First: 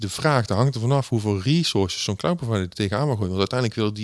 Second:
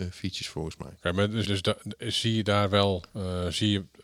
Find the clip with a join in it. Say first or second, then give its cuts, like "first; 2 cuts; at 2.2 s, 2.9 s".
second; 3 cuts; at 1.0 s, 1.4 s, 3.1 s